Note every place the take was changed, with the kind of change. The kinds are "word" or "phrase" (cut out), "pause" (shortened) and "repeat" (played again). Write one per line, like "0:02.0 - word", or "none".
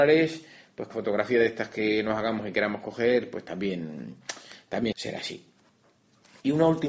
0:00.9 - word
0:04.9 - word